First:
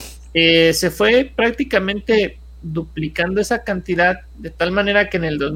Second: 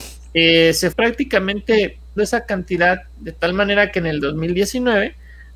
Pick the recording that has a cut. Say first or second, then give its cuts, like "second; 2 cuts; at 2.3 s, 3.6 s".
second; 2 cuts; at 0.9 s, 2.2 s